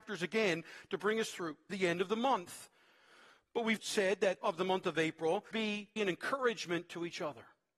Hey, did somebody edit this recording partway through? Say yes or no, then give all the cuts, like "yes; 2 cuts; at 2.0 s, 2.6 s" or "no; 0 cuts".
yes; 5 cuts; at 1.7 s, 3.8 s, 4.4 s, 5.5 s, 6.0 s